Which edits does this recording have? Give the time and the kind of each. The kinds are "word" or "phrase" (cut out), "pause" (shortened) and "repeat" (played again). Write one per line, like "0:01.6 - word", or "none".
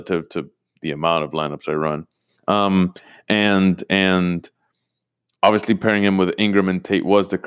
none